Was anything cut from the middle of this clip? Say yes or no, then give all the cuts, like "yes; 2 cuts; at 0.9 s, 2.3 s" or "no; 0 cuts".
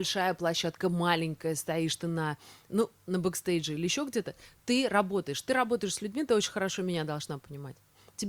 no; 0 cuts